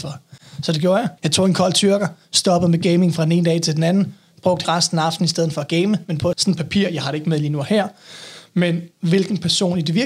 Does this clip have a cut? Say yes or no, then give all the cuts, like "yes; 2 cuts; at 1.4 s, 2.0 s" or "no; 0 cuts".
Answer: yes; 4 cuts; at 1.2 s, 4.6 s, 6.3 s, 8.9 s